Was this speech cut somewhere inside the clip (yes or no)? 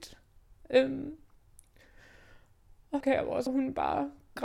yes